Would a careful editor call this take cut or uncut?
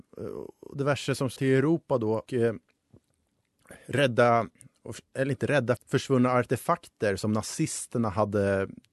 cut